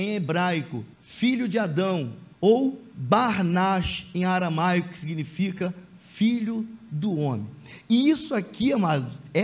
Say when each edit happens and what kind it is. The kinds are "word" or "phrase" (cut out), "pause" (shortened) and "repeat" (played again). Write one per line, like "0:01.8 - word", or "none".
0:00.9 - pause
0:02.3 - pause